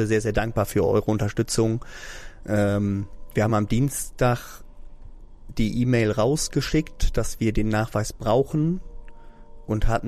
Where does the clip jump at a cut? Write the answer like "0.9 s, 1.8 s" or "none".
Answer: none